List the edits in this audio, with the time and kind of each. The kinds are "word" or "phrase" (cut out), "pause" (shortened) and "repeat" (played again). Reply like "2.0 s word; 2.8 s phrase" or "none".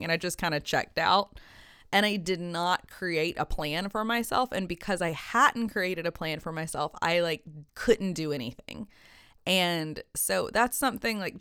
7.7 s pause